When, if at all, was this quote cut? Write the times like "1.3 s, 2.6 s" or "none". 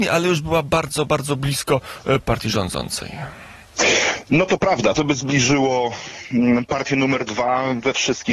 2.2 s, 4.9 s

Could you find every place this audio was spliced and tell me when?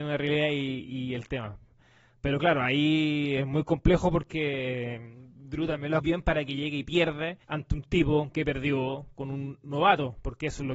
6.0 s, 7.4 s

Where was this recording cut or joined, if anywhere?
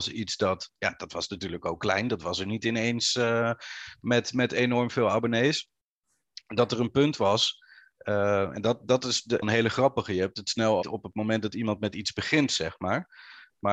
9.4 s, 10.8 s

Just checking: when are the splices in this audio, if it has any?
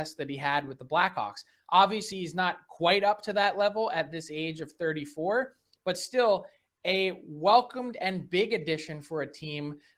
none

